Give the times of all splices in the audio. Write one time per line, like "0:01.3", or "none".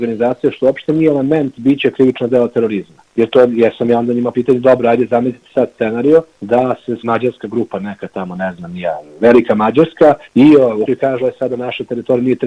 0:03.1
0:04.3
0:06.3
0:07.0
0:10.2
0:10.9
0:11.2